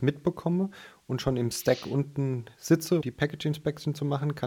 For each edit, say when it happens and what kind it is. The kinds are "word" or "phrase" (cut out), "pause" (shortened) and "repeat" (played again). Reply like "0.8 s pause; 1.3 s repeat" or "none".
3.0 s word

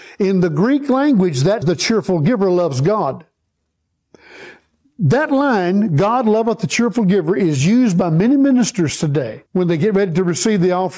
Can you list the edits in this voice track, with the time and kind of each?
1.6 s word; 9.5 s pause

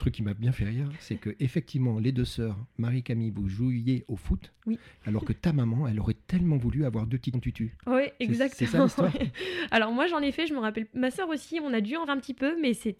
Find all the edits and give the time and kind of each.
7.3 s word; 12.1 s word

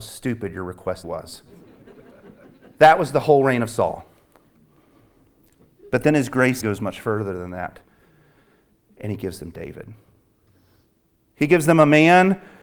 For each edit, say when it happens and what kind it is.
1.0 s word; 6.6 s word

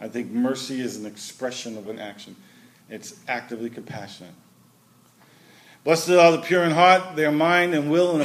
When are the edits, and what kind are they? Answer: 1.9 s word

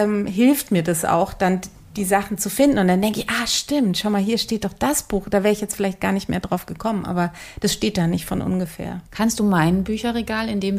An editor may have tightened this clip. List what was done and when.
9.1 s pause

